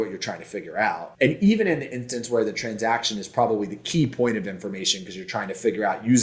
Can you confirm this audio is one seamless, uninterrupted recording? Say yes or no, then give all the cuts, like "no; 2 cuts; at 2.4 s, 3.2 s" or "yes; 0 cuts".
yes; 0 cuts